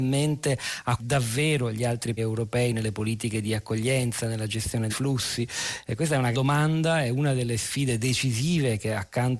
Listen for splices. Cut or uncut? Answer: cut